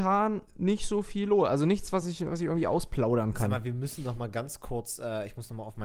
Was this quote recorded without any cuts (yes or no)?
yes